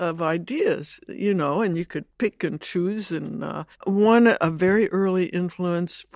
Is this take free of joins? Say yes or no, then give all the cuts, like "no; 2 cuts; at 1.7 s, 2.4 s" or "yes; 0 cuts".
no; 1 cut; at 3.7 s